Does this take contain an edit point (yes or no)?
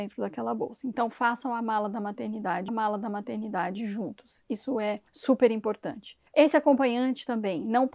yes